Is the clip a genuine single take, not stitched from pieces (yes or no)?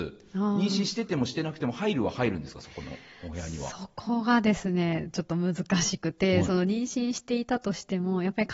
yes